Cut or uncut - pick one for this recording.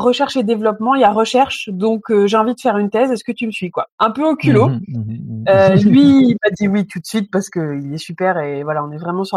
cut